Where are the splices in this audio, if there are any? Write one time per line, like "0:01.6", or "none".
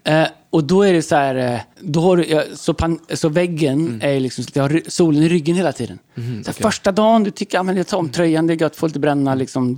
0:01.7